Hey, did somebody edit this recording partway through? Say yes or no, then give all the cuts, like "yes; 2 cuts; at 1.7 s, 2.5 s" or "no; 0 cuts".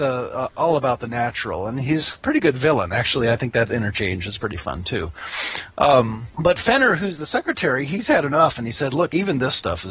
yes; 1 cut; at 6.3 s